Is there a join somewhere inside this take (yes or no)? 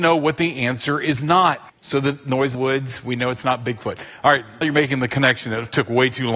yes